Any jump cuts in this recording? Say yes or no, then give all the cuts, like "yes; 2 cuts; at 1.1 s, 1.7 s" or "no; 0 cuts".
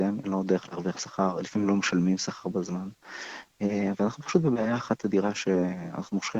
no; 0 cuts